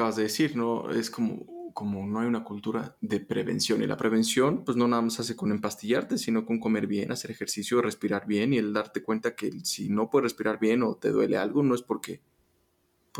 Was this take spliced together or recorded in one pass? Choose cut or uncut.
uncut